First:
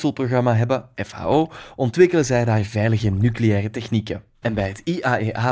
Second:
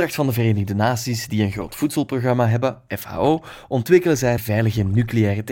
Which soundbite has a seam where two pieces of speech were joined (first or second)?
second